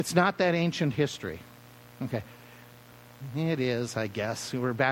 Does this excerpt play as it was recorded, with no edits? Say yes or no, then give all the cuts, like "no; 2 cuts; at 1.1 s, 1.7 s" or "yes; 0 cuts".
yes; 0 cuts